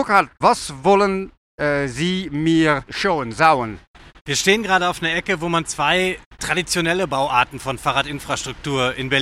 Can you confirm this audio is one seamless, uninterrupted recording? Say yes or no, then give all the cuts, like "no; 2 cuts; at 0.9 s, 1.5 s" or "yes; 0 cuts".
yes; 0 cuts